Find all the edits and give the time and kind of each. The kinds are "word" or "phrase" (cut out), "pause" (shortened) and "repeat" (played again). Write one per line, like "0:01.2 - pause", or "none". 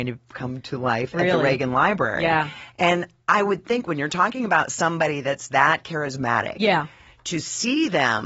none

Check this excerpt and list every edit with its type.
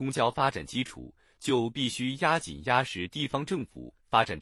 none

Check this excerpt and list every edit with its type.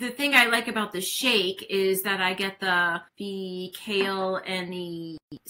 none

